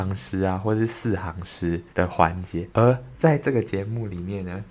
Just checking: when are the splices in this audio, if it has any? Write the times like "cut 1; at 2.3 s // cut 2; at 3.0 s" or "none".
cut 1; at 1.9 s